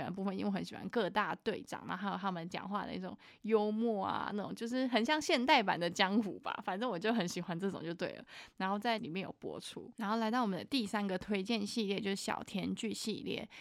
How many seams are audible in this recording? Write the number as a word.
one